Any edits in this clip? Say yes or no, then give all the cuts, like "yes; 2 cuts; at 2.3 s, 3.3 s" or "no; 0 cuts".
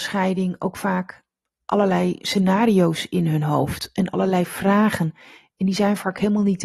no; 0 cuts